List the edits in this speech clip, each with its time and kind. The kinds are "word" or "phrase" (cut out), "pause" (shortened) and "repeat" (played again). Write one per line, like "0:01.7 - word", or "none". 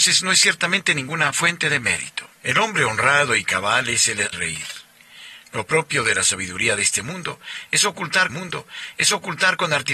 0:02.3 - pause
0:04.3 - word
0:08.3 - repeat